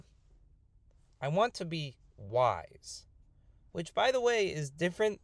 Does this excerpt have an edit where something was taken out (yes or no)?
no